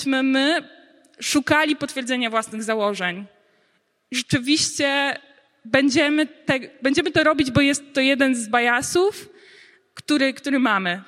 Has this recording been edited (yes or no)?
no